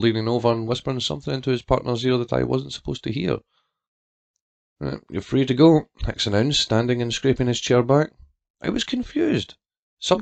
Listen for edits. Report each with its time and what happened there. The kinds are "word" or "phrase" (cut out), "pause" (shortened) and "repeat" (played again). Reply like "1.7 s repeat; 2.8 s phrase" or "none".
none